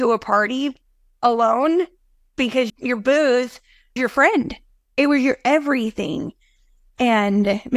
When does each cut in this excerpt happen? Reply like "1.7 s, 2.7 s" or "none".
2.7 s, 4.0 s